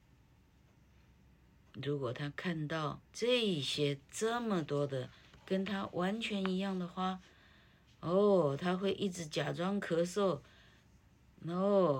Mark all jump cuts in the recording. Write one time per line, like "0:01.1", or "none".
0:03.0